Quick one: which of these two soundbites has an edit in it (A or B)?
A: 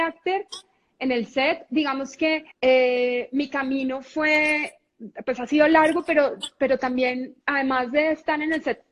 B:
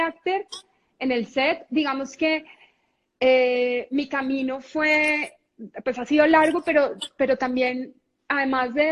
A